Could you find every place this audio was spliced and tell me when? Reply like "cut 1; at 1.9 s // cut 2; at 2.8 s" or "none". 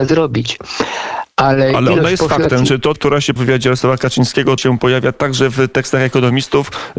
cut 1; at 2.9 s // cut 2; at 3.4 s // cut 3; at 4.6 s